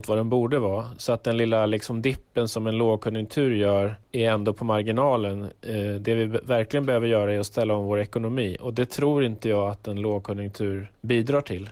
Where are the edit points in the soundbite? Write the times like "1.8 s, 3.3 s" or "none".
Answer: none